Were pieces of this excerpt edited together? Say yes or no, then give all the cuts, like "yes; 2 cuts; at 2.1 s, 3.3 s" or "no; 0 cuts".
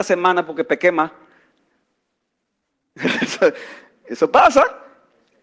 no; 0 cuts